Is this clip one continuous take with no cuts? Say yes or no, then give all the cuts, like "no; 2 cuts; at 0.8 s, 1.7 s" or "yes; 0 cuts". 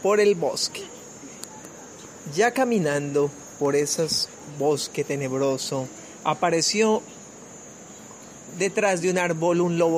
yes; 0 cuts